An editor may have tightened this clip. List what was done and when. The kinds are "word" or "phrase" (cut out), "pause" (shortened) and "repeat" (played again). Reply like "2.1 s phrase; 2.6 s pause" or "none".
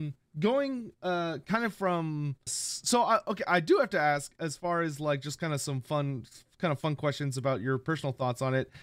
2.5 s word